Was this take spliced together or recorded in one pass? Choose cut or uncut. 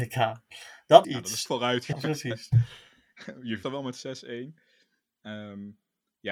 cut